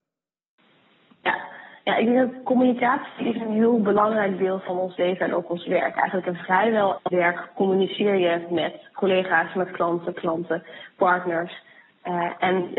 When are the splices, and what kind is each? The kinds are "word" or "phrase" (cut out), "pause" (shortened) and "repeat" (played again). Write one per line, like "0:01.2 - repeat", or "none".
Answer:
0:05.0 - word
0:07.0 - word
0:10.1 - word

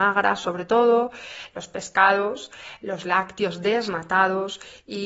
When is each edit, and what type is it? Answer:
none

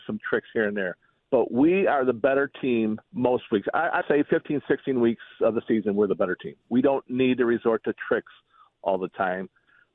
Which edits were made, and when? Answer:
0:01.2 - pause
0:03.0 - pause
0:04.0 - word

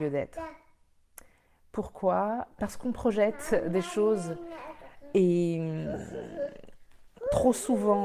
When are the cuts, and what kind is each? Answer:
0:02.6 - word

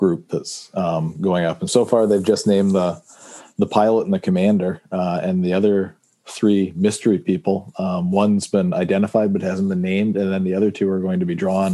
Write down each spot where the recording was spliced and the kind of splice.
0:01.7 - word

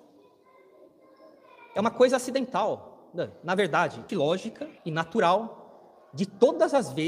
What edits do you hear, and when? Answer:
0:04.1 - phrase
0:04.8 - pause

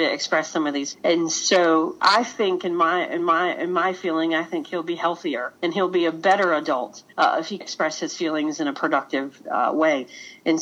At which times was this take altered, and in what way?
0:00.9 - word
0:03.2 - repeat
0:05.6 - pause
0:07.1 - pause
0:07.6 - word

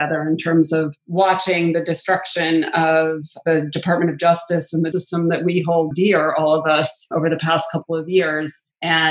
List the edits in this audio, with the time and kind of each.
0:04.9 - word
0:05.9 - word

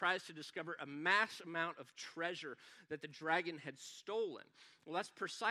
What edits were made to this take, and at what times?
none

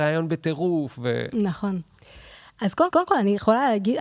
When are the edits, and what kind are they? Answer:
0:02.9 - repeat

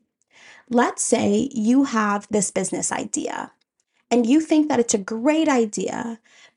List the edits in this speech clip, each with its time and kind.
0:02.3 - word

